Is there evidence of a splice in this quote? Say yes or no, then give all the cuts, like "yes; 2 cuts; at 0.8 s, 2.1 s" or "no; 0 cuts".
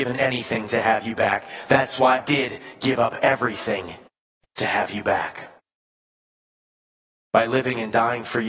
yes; 1 cut; at 2.2 s